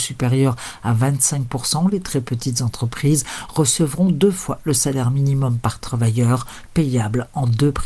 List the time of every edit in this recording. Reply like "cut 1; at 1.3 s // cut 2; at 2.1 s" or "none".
none